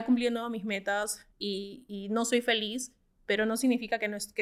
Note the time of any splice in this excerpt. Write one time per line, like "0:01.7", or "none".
0:01.3